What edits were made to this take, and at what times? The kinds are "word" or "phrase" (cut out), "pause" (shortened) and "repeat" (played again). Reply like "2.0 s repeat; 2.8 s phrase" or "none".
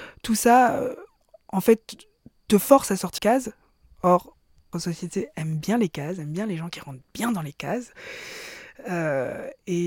3.2 s word; 4.7 s word